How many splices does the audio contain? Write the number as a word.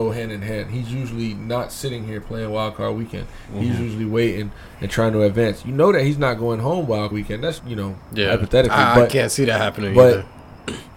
two